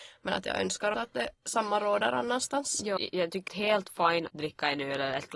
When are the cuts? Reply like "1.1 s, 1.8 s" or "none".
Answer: 0.9 s, 1.3 s, 3.0 s, 3.5 s, 4.3 s